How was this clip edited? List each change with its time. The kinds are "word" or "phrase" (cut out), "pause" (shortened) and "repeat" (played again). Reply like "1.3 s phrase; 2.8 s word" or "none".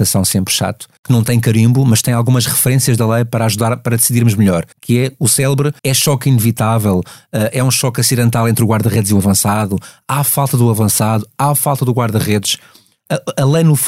1.0 s pause; 4.7 s pause; 5.8 s pause